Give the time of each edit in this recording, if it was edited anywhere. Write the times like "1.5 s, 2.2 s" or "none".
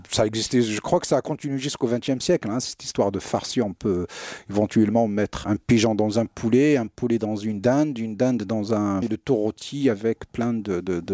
5.4 s, 9.0 s